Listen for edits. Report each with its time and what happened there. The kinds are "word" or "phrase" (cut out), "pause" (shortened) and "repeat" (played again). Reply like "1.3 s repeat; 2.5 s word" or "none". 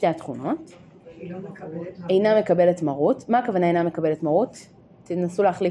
none